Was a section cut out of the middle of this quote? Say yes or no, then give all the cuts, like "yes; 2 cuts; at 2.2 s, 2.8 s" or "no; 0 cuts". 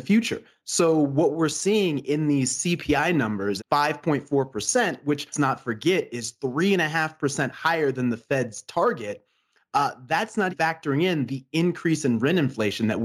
yes; 3 cuts; at 3.6 s, 5.3 s, 10.5 s